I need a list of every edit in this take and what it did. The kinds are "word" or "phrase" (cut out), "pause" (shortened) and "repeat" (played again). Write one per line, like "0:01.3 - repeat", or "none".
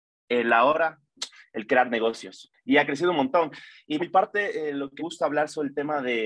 0:01.2 - word
0:02.5 - pause
0:04.0 - word
0:05.0 - word